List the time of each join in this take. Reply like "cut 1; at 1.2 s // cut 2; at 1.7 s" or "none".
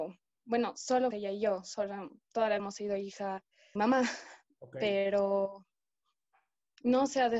cut 1; at 1.1 s // cut 2; at 2.6 s // cut 3; at 3.8 s